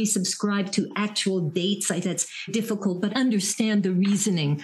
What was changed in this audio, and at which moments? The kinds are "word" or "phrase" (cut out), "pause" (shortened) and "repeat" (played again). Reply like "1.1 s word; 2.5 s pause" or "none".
2.0 s word; 2.5 s word; 3.1 s word

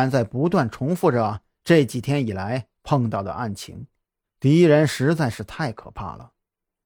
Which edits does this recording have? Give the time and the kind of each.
4.2 s pause

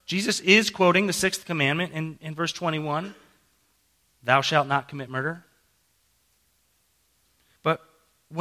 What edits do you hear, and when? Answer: none

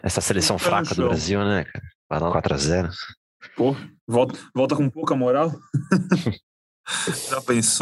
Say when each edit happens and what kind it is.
2.0 s pause; 2.3 s phrase

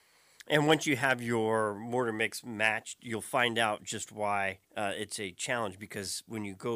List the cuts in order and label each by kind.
4.6 s pause

